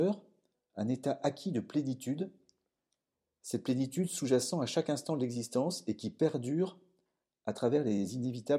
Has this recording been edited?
no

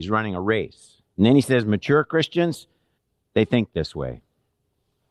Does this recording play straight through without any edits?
no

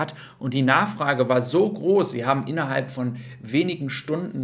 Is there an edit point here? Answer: no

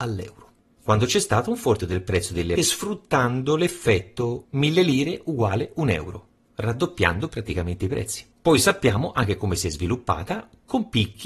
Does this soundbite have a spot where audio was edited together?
yes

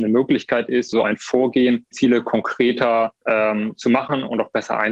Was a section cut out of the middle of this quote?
yes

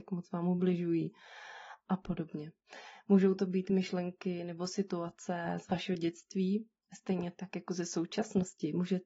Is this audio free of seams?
yes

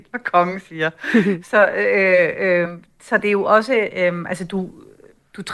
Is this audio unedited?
yes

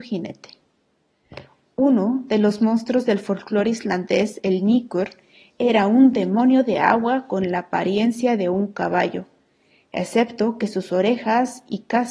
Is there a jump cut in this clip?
no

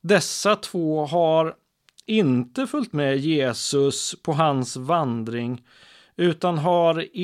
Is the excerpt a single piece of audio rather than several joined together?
yes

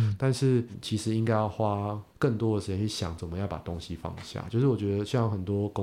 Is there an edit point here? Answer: yes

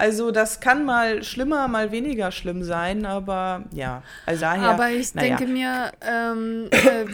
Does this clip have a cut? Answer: yes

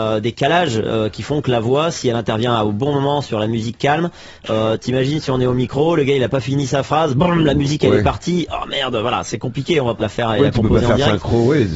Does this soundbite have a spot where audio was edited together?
yes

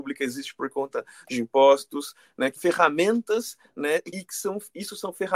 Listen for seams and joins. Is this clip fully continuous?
no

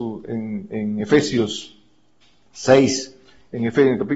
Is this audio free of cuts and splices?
yes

